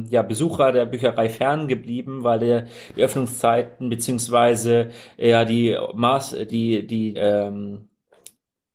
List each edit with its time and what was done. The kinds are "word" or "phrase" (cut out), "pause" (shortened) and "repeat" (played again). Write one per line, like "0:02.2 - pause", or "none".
0:06.5 - word
0:07.1 - word